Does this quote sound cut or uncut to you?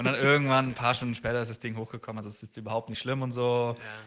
uncut